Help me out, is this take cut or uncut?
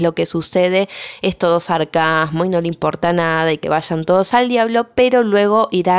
cut